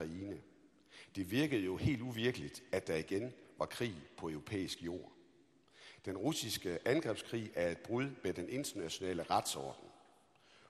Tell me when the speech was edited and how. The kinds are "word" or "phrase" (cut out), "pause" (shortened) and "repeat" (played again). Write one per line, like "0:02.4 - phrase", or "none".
none